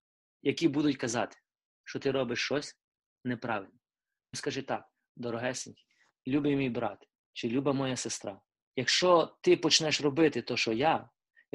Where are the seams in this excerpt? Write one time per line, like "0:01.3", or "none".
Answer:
0:04.3
0:08.6